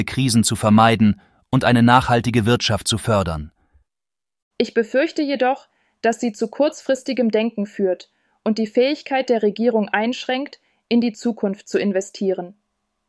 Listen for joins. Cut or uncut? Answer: uncut